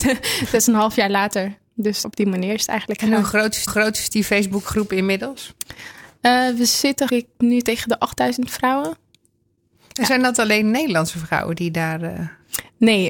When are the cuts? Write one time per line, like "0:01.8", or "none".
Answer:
0:02.0
0:03.7
0:07.1